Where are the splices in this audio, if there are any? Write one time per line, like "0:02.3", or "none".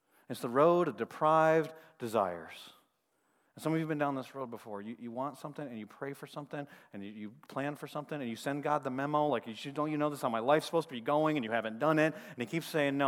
none

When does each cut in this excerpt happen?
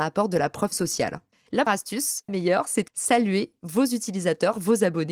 0:01.7
0:02.3
0:02.9

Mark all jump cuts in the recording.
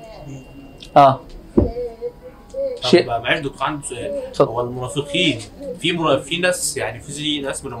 none

